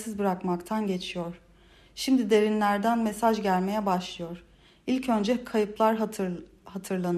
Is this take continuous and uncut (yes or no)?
yes